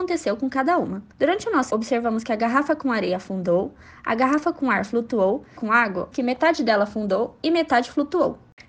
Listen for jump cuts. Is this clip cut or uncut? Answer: cut